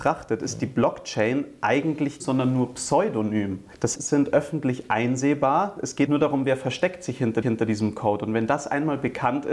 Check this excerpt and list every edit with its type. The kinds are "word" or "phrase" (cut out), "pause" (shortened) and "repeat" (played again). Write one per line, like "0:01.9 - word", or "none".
0:02.2 - phrase
0:03.9 - phrase
0:06.1 - word
0:07.4 - repeat